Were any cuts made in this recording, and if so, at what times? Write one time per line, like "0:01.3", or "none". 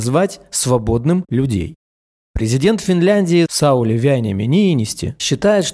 0:01.3